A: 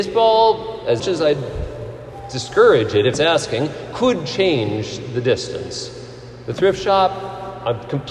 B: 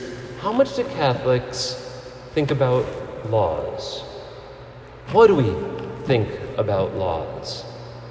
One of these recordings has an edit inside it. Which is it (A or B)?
A